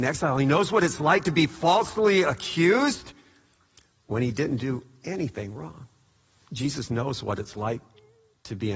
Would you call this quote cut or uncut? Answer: uncut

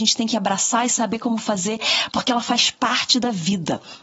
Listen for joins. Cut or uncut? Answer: uncut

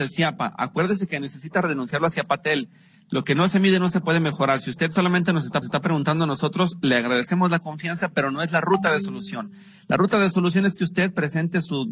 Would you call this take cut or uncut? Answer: cut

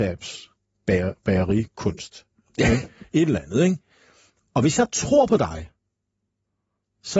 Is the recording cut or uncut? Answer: uncut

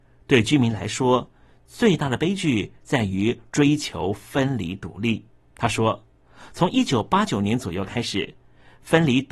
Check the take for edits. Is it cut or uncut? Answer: cut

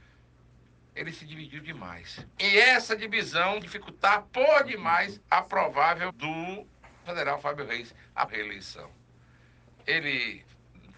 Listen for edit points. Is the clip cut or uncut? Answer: cut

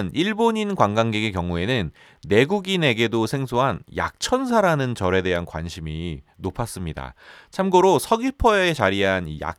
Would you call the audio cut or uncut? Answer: uncut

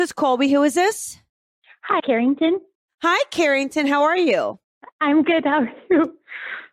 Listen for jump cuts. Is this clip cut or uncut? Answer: cut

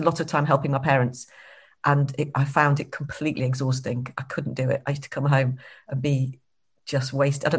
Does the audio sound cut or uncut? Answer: uncut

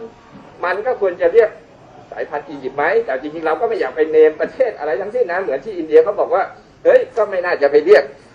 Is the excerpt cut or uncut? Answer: uncut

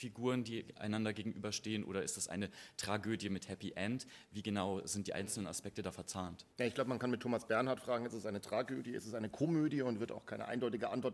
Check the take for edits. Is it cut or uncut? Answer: cut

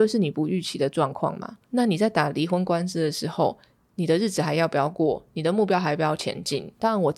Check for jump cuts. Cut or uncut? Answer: cut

